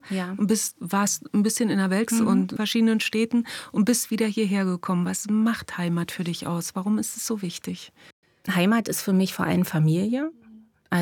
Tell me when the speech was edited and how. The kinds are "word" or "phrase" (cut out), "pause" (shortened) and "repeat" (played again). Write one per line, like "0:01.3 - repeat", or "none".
0:02.1 - word
0:02.6 - phrase